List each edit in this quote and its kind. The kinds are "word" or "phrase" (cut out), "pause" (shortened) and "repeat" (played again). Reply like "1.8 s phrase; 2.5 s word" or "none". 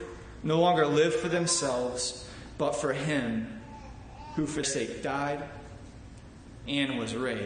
4.6 s word